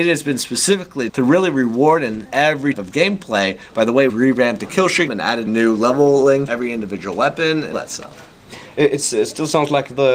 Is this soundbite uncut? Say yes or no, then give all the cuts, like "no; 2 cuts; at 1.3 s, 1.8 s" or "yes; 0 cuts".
no; 8 cuts; at 1.1 s, 2.3 s, 2.7 s, 4.1 s, 5.1 s, 5.5 s, 6.5 s, 7.7 s